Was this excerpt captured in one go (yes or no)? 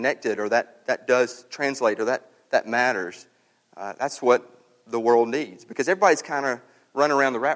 yes